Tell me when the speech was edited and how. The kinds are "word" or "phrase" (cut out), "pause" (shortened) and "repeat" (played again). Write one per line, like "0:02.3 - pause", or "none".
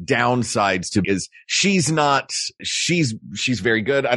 0:01.0 - phrase
0:02.6 - word